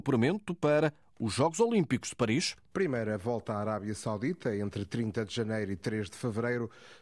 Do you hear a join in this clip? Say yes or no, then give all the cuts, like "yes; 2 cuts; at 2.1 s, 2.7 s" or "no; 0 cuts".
no; 0 cuts